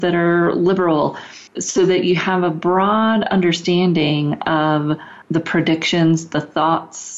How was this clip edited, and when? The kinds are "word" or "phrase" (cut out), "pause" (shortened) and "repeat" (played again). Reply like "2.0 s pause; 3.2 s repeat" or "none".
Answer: 1.5 s pause; 5.2 s pause